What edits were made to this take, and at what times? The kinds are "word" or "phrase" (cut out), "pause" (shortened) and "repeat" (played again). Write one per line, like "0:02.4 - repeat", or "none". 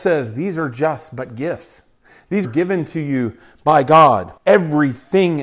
0:02.4 - word
0:04.4 - pause

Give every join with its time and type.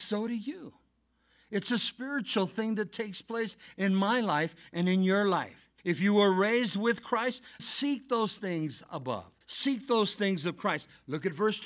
0:05.8 - pause
0:07.6 - word
0:09.4 - pause

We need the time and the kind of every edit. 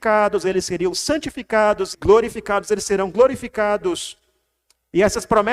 0:01.9 - phrase

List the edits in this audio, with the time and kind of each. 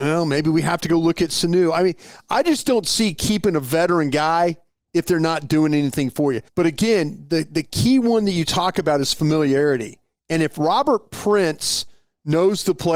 0:06.5 - pause

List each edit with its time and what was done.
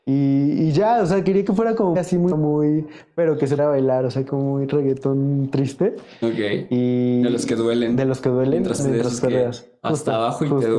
0:02.0 - word
0:02.3 - word
0:03.6 - word
0:04.3 - word
0:08.8 - word

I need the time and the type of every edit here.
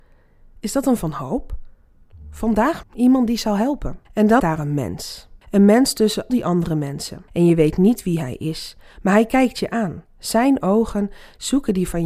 0:01.0 - word
0:02.8 - word
0:04.0 - pause
0:04.4 - phrase
0:05.4 - pause
0:06.3 - word
0:07.3 - pause

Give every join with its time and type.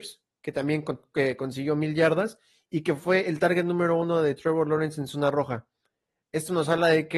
none

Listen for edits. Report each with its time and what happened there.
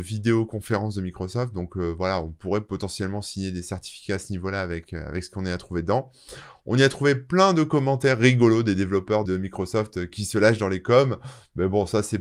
0:09.2 - word
0:10.1 - word

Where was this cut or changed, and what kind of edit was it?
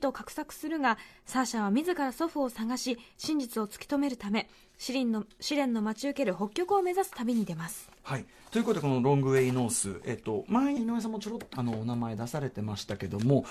0:10.8 - word
0:11.5 - word

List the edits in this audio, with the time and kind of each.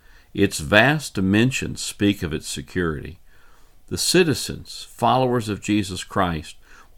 none

